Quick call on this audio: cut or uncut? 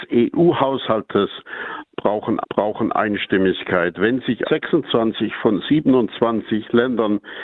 cut